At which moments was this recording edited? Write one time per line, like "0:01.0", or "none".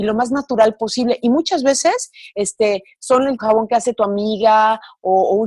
0:03.4